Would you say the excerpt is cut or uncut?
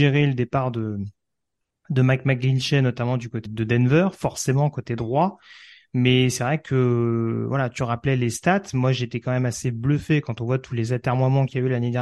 cut